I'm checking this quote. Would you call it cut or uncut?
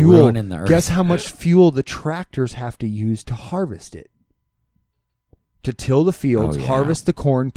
uncut